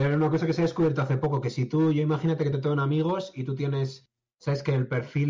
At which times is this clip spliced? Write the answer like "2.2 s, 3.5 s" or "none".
none